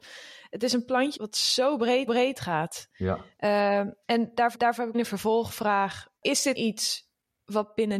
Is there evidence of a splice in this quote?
yes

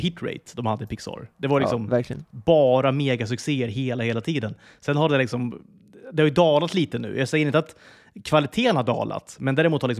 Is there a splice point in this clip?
no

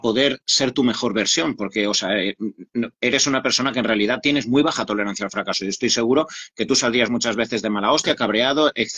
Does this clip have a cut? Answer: no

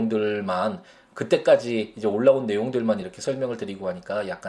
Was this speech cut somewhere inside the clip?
no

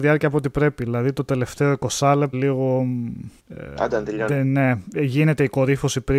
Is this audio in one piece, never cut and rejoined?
no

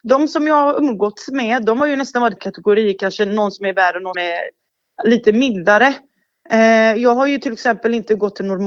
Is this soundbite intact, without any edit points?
no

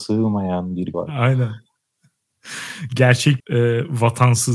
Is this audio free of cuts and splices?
no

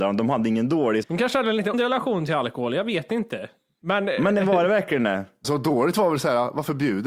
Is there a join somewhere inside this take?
yes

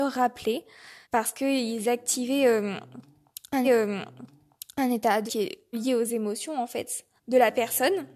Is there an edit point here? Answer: yes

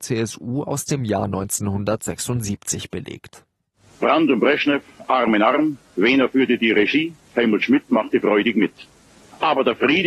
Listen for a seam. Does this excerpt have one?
no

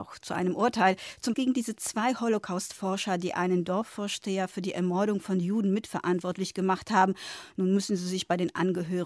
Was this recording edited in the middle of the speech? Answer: yes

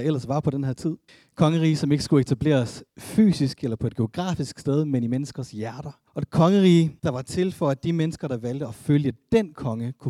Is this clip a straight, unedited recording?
no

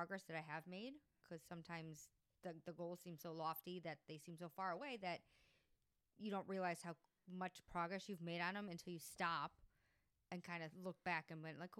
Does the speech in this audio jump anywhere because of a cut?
no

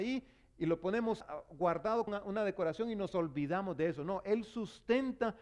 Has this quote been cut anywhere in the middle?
yes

